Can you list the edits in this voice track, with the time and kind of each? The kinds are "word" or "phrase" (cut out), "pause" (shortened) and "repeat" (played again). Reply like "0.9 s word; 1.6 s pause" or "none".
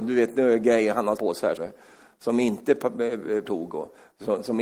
1.2 s word; 1.6 s word; 3.5 s word